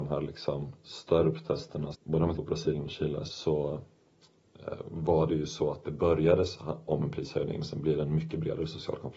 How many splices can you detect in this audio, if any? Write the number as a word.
three